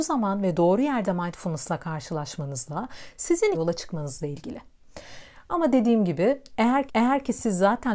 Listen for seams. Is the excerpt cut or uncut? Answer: cut